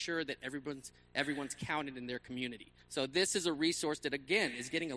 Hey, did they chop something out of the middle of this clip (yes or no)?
yes